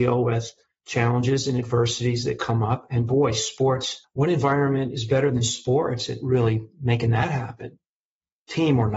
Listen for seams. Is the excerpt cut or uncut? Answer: uncut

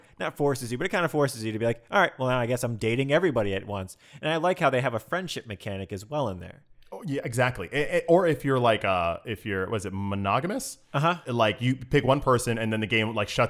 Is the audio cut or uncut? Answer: uncut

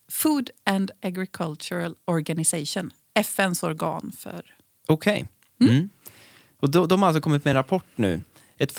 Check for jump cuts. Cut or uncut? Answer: uncut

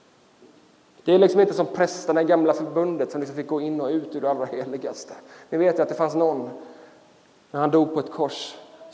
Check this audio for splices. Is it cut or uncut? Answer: uncut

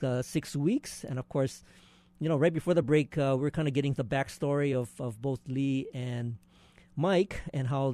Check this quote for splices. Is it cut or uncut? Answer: uncut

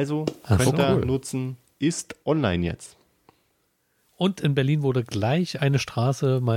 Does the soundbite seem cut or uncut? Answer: uncut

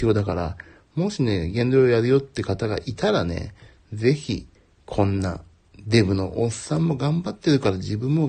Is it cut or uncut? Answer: cut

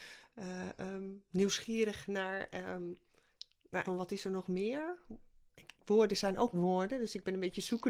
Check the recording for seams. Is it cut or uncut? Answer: cut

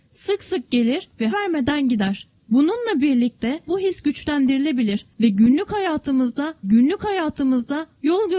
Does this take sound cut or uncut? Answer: cut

